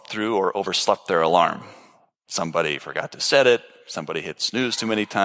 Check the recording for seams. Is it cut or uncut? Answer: uncut